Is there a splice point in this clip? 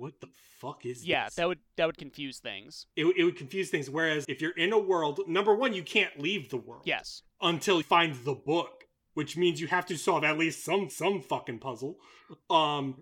yes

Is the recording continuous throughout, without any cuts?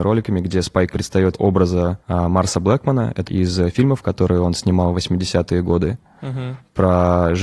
no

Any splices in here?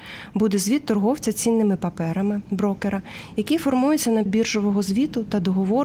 yes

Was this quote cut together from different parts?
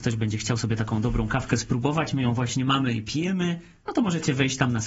no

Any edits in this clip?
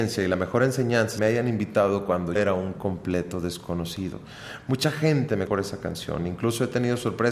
yes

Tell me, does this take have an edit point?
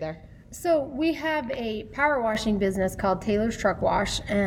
no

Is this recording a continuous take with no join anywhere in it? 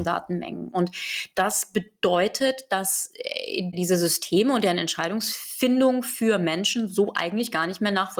yes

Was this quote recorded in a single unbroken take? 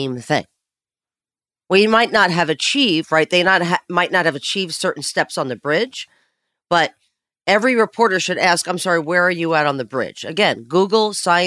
yes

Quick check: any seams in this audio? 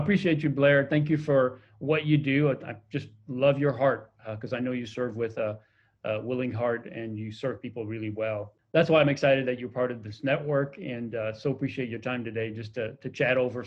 no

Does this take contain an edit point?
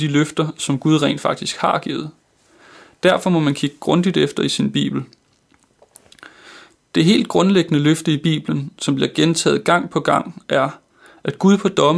no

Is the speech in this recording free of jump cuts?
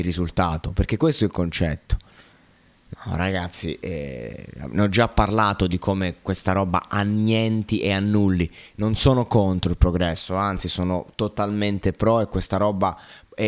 yes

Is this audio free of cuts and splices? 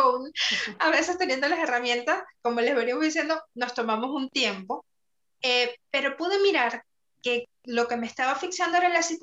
no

